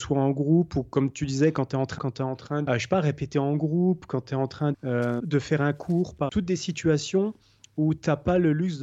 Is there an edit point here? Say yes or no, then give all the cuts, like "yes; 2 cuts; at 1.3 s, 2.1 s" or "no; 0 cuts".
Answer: yes; 5 cuts; at 2.0 s, 2.7 s, 4.7 s, 5.2 s, 6.3 s